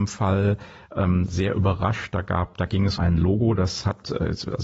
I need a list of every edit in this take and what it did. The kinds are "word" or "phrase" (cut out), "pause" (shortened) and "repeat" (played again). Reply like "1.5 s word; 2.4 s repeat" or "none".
3.0 s word